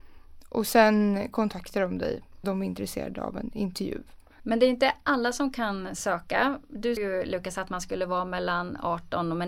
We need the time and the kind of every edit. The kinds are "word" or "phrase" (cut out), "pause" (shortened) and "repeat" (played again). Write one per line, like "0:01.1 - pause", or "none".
0:02.4 - word
0:07.0 - word

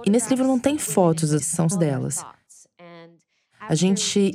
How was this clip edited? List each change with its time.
0:01.4 - word
0:01.7 - phrase

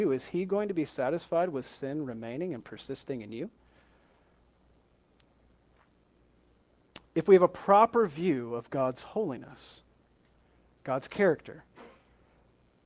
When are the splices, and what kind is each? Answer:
none

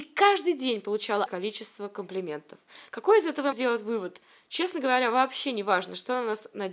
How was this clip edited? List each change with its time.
0:01.3 - word
0:03.5 - word

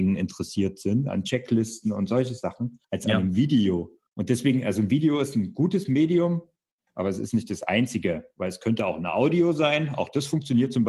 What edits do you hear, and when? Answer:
0:02.8 - pause
0:04.1 - pause

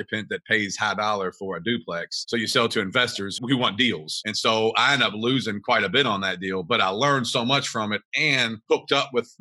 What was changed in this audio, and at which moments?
0:03.4 - word

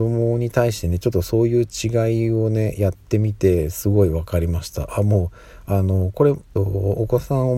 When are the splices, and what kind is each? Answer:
0:06.6 - phrase

